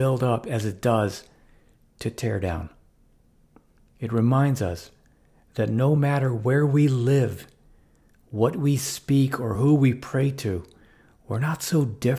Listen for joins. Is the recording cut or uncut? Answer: uncut